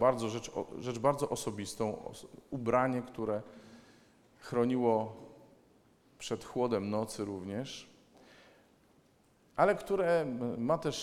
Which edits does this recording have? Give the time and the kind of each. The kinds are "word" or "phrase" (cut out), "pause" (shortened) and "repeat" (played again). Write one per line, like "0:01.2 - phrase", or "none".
none